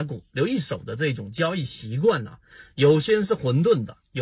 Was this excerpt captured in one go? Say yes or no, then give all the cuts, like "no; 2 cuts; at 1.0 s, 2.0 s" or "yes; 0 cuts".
yes; 0 cuts